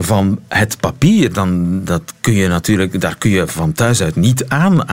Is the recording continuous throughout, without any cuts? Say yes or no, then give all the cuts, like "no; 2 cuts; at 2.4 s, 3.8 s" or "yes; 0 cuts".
yes; 0 cuts